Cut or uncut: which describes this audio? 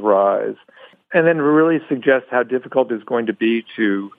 uncut